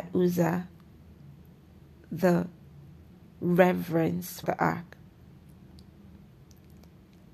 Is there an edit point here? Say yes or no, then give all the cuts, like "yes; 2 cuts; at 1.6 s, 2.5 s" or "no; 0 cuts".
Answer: yes; 2 cuts; at 2.0 s, 4.4 s